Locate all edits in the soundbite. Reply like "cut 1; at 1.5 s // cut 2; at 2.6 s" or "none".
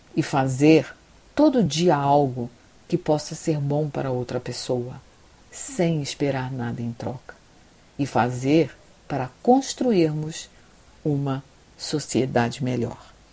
none